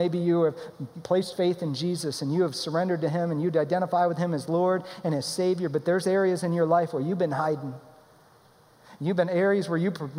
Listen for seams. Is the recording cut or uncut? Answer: cut